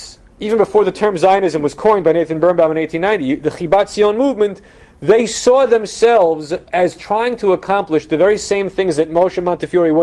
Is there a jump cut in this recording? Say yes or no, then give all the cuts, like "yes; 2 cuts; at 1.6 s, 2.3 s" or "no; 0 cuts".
no; 0 cuts